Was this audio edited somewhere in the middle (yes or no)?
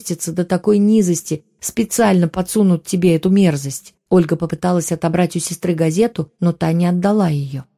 yes